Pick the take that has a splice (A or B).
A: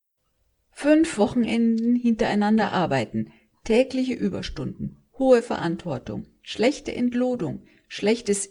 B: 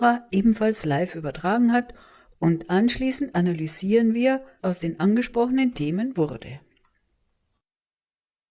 B